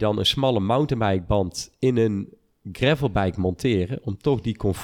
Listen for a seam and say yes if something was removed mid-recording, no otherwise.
no